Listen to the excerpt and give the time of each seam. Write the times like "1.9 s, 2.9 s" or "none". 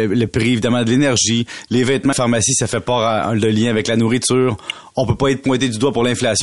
2.1 s